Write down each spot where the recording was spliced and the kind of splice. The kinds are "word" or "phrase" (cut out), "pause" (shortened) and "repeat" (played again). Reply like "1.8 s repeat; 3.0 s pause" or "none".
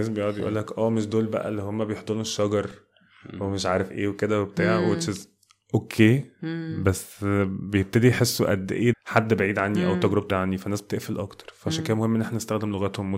8.9 s word; 10.3 s word